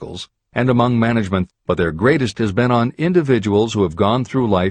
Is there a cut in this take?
yes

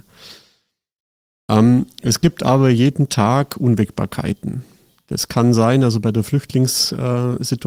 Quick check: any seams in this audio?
no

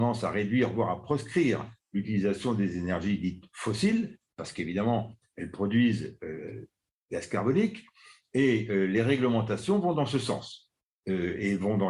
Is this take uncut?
yes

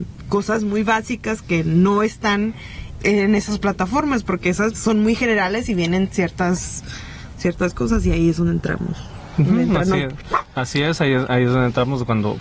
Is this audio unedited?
no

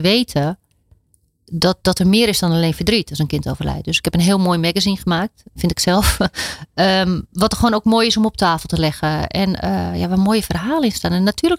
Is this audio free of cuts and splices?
yes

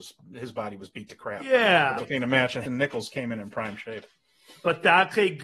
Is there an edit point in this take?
yes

